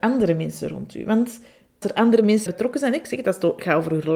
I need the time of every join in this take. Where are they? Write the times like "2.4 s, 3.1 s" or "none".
1.8 s, 2.5 s